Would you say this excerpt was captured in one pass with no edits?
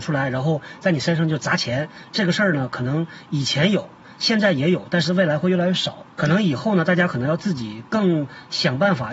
no; 1 cut; at 6.1 s

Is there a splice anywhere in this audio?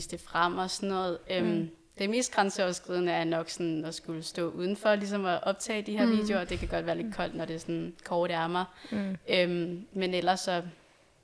no; 0 cuts

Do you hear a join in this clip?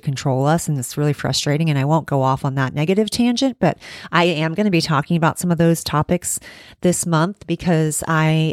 no; 0 cuts

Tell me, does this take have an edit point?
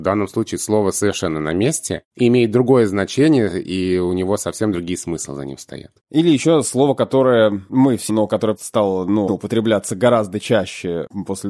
yes; 5 cuts; at 4.7 s, 6.0 s, 8.1 s, 8.6 s, 9.3 s

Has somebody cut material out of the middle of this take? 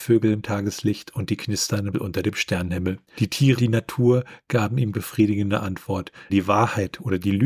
yes; 5 cuts; at 1.9 s, 3.1 s, 3.6 s, 4.9 s, 6.3 s

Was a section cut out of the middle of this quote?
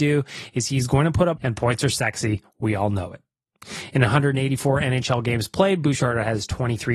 yes; 1 cut; at 1.4 s

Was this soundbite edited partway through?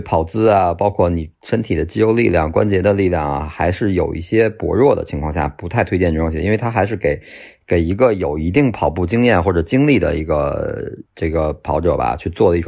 yes; 1 cut; at 11.1 s

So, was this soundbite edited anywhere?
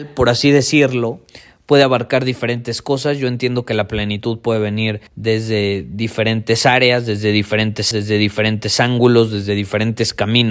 yes; 2 cuts; at 5.1 s, 7.9 s

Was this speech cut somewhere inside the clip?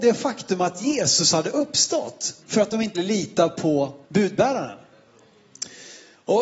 yes; 3 cuts; at 2.4 s, 2.9 s, 4.0 s

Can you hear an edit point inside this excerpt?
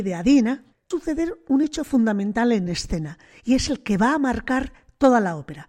no; 0 cuts

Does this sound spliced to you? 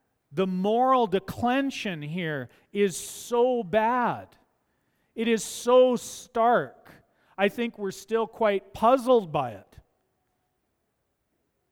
no; 0 cuts

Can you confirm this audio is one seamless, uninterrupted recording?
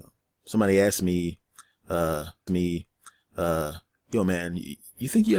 no; 1 cut; at 2.5 s

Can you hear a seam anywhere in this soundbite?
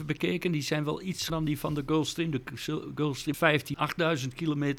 yes; 3 cuts; at 1.3 s, 3.3 s, 3.7 s

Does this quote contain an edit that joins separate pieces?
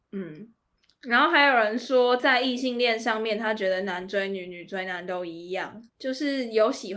yes; 1 cut; at 5.9 s

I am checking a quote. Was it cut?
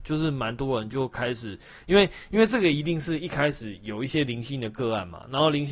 no; 0 cuts

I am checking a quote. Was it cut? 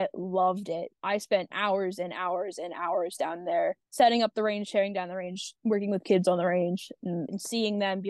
no; 0 cuts

